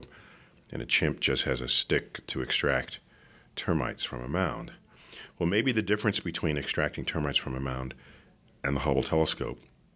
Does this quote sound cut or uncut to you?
uncut